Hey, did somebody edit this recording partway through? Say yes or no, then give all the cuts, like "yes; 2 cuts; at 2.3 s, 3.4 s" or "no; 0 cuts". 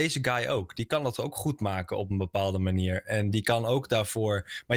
no; 0 cuts